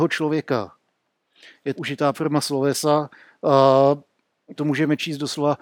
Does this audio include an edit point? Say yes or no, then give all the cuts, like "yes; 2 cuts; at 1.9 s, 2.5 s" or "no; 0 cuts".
yes; 3 cuts; at 1.8 s, 2.1 s, 4.6 s